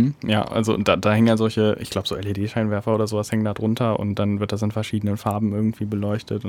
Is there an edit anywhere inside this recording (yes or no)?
no